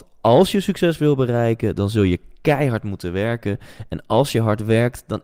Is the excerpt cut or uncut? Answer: uncut